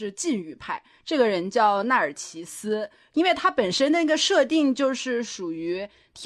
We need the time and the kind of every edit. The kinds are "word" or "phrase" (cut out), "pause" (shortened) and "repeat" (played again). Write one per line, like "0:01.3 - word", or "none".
none